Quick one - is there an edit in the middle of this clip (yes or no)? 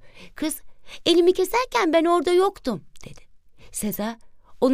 no